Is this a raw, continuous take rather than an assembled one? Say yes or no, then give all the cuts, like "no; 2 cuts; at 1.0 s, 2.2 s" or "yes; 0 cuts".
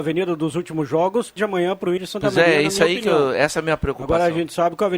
no; 2 cuts; at 1.4 s, 2.0 s